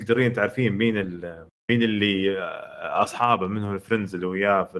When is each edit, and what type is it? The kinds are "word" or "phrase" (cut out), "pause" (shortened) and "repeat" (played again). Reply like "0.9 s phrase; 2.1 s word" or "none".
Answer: none